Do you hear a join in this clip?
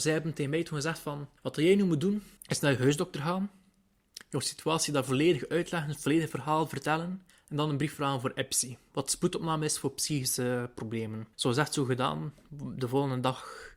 yes; 4 cuts; at 1.4 s, 2.4 s, 7.3 s, 11.3 s

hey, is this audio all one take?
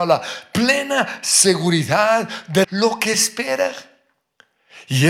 no; 2 cuts; at 2.6 s, 3.1 s

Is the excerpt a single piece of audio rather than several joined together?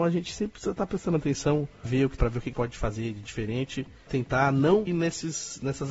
no; 5 cuts; at 1.8 s, 2.2 s, 2.5 s, 4.1 s, 4.9 s

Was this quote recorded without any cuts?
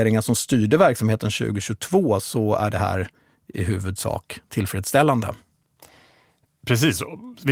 yes; 0 cuts

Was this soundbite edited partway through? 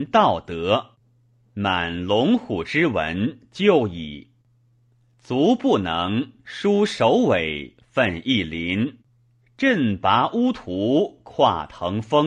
no; 0 cuts

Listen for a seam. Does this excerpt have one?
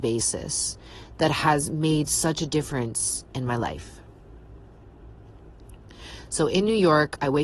no; 0 cuts

